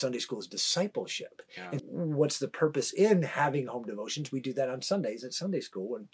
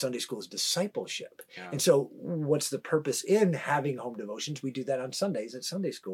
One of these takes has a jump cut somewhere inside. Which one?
first; 1 cut; at 1.8 s

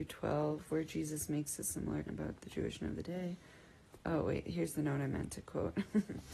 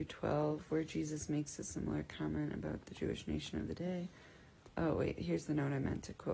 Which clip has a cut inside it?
first; 2 cuts; at 2.1 s, 2.8 s

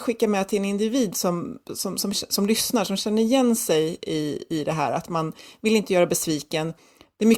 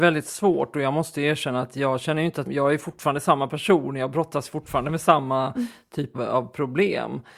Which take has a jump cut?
second; 2 cuts; at 2.5 s, 6.1 s

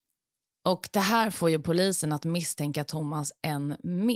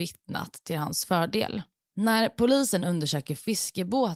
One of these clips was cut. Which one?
second; 1 cut; at 1.8 s

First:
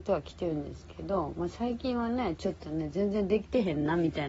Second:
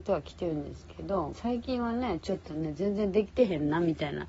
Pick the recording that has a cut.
second; 1 cut; at 1.3 s

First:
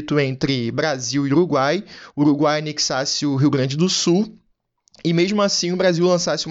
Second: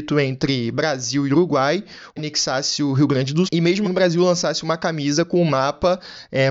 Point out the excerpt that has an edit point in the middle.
second; 3 cuts; at 2.2 s, 3.5 s, 3.8 s

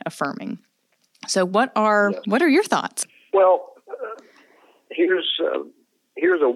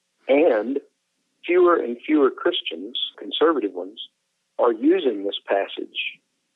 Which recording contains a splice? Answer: second; 1 cut; at 3.1 s

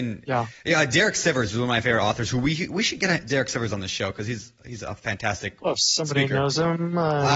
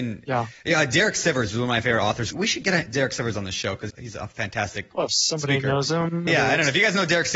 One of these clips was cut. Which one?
second; 3 cuts; at 2.3 s, 3.9 s, 6.3 s

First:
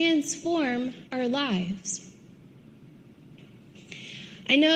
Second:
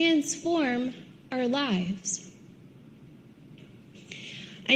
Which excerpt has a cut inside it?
first; 1 cut; at 1.1 s

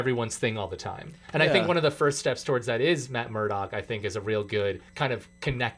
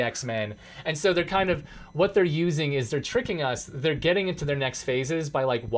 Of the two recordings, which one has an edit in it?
first; 2 cuts; at 1.2 s, 4.9 s

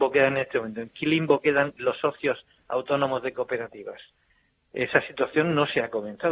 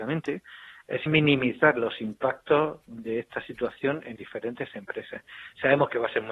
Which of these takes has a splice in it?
second; 2 cuts; at 1.1 s, 4.2 s

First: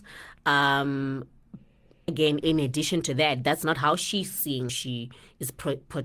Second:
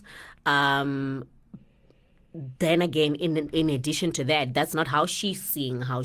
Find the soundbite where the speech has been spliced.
first; 3 cuts; at 2.1 s, 2.4 s, 4.7 s

